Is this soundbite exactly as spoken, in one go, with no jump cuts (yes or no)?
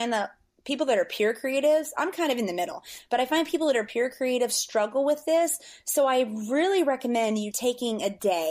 yes